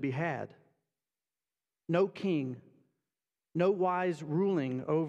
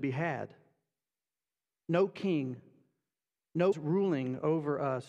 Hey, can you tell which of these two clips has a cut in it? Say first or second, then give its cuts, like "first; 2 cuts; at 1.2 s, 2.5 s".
second; 1 cut; at 3.7 s